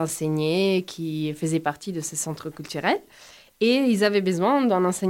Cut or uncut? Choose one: uncut